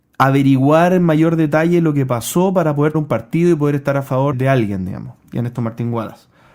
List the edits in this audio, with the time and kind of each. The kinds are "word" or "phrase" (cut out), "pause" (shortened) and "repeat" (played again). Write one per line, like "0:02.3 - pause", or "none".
0:02.9 - word
0:04.3 - word
0:05.6 - word